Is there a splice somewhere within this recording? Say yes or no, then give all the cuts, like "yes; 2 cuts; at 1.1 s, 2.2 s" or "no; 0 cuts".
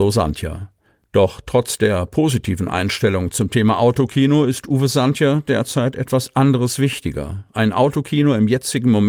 no; 0 cuts